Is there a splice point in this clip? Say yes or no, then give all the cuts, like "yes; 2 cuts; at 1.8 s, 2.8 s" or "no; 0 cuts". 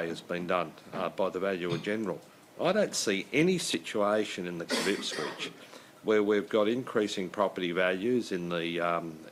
yes; 1 cut; at 4.7 s